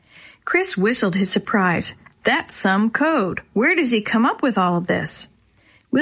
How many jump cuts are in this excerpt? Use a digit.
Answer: 0